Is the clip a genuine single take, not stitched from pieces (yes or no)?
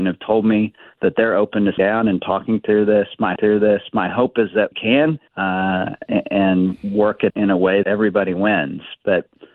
no